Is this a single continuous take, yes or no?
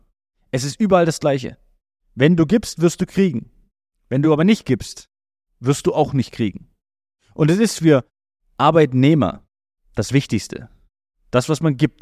yes